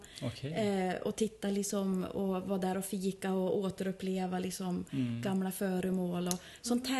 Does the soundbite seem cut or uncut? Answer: uncut